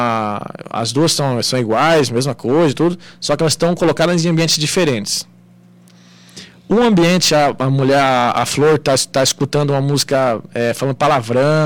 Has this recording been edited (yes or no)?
no